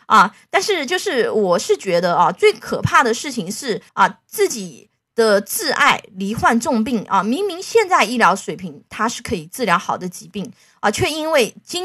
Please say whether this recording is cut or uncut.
cut